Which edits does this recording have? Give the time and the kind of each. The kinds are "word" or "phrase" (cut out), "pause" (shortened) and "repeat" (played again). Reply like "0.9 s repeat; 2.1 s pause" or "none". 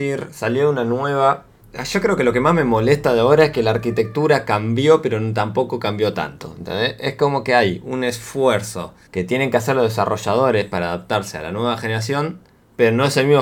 1.6 s pause; 9.1 s pause